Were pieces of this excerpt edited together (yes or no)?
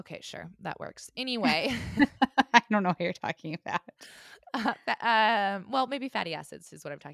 no